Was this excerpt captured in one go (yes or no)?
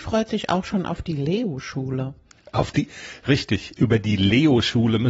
yes